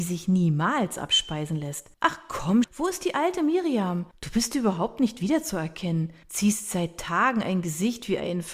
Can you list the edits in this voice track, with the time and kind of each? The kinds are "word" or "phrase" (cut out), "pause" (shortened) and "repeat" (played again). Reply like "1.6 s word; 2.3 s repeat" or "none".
1.9 s pause; 2.6 s word; 4.1 s pause; 6.2 s pause

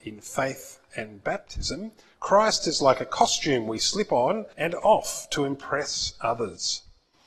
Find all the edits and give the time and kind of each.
4.5 s pause

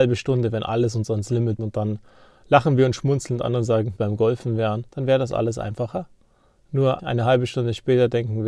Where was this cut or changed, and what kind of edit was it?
1.6 s word; 4.0 s phrase; 4.9 s pause; 7.0 s word

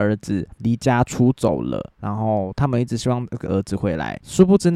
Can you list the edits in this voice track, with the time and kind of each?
1.9 s pause

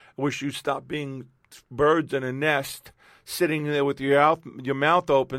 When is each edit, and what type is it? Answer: none

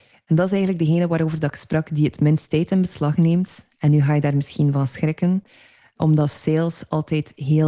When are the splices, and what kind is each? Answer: none

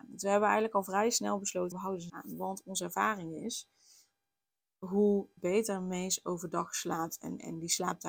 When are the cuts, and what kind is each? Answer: 1.7 s word; 2.1 s word; 5.4 s word

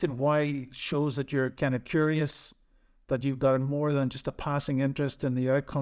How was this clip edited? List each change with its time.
none

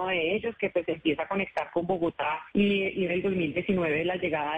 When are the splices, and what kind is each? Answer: 2.5 s pause; 3.1 s phrase

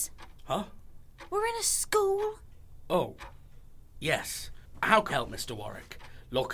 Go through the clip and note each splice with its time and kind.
5.1 s word

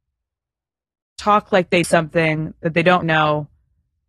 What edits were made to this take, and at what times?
1.8 s word; 3.0 s word

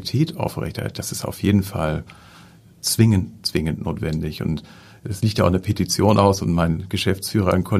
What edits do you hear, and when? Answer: none

